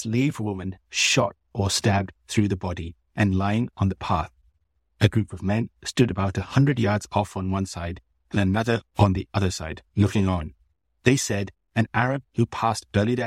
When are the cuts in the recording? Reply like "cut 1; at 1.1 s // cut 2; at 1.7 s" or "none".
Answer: none